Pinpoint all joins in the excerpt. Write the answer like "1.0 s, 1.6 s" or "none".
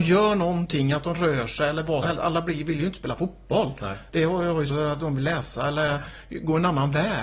2.0 s, 4.7 s